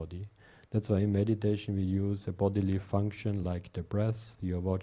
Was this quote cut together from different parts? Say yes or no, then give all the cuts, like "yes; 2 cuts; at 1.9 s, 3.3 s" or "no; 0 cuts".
no; 0 cuts